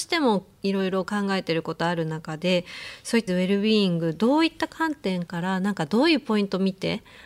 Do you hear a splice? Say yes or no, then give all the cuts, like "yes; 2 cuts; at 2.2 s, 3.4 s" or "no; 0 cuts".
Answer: yes; 1 cut; at 3.3 s